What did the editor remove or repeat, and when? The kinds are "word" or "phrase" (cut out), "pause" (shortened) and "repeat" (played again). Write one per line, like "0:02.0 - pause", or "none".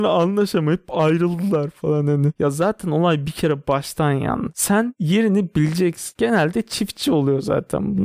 none